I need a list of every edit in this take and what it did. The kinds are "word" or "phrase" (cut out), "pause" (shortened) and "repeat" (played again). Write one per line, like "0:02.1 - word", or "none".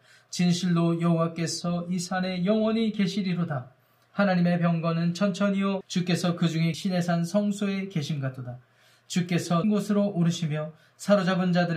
0:05.8 - word
0:06.7 - word
0:09.6 - word